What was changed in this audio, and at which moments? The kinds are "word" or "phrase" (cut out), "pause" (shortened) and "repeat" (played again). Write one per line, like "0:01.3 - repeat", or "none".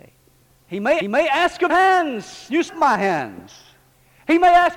0:01.0 - repeat
0:01.7 - phrase
0:02.7 - phrase